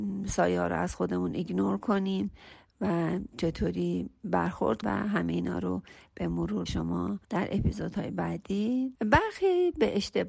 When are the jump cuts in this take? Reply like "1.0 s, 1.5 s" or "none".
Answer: 4.8 s, 6.7 s, 7.2 s, 8.9 s

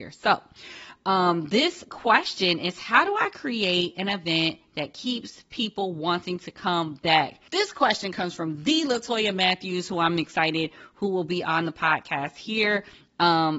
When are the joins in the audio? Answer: 7.5 s

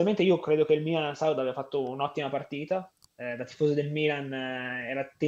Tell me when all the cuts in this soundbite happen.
none

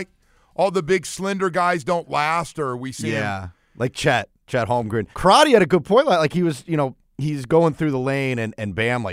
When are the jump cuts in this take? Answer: 5.1 s

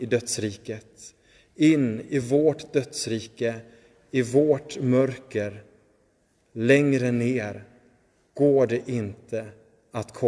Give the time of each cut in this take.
none

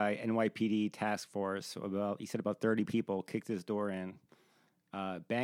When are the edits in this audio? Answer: none

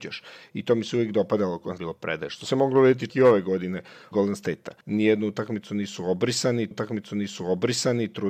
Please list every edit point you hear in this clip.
1.8 s, 3.1 s, 4.1 s, 4.8 s, 6.7 s

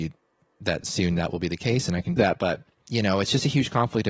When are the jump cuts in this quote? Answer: 2.2 s, 2.7 s

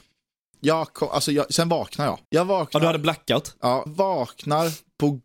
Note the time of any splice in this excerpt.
2.2 s, 3.9 s

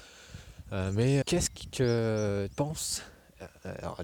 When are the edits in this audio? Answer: 1.2 s, 2.5 s

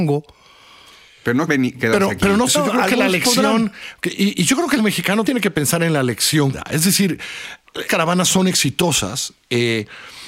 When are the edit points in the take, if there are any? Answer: 1.5 s, 2.5 s, 4.3 s, 4.8 s, 5.3 s, 6.5 s, 7.9 s

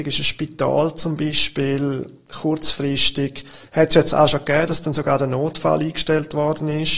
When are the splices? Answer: none

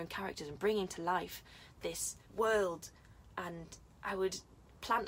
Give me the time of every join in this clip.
2.2 s

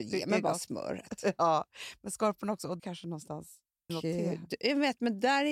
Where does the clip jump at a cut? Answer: 2.8 s, 3.9 s

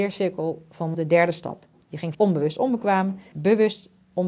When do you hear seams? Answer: 0.9 s, 2.1 s, 3.3 s

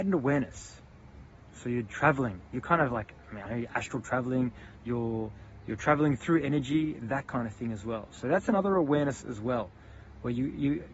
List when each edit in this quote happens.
3.4 s

